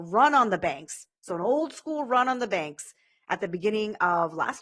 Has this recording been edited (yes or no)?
no